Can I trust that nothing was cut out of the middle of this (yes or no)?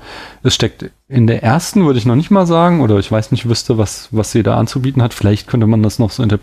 yes